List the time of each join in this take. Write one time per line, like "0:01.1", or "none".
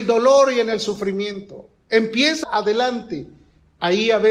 0:02.4